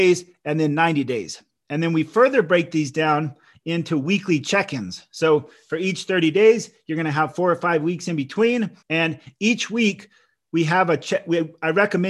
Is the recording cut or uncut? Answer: cut